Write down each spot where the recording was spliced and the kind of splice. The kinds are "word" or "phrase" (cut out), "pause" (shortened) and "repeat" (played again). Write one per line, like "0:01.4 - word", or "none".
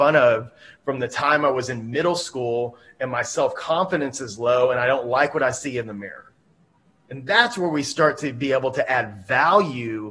none